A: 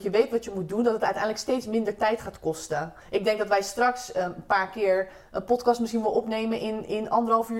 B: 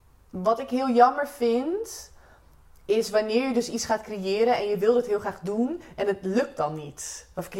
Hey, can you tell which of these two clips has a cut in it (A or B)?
A